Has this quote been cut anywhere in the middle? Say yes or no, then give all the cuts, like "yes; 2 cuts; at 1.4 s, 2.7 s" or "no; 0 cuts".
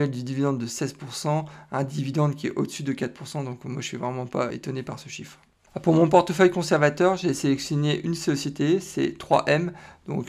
yes; 1 cut; at 4.5 s